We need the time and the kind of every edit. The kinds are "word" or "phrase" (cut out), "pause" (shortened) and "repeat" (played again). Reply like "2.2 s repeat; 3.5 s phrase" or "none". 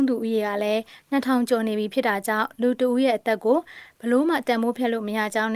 none